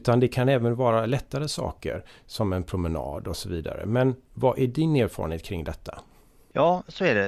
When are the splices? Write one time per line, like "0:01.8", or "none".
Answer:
none

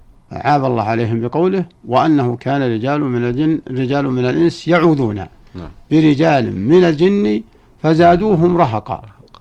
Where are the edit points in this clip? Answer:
none

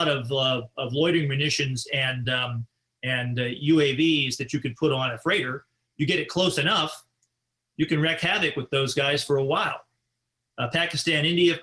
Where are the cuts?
none

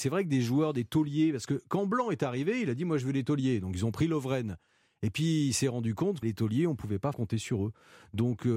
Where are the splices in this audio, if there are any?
0:06.2
0:07.1

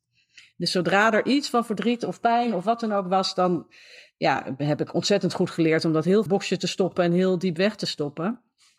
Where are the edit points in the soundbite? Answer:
0:06.3

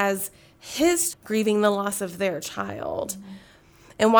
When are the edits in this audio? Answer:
0:01.1

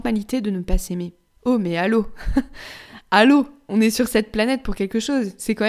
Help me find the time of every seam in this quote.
0:01.3

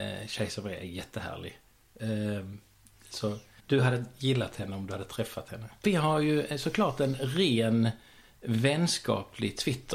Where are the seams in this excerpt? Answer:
0:03.6

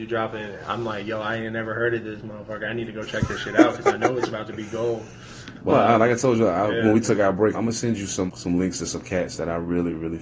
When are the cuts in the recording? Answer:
0:05.7
0:07.5
0:08.3

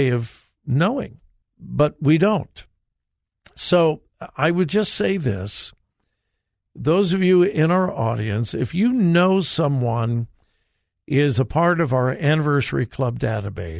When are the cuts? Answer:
0:01.4

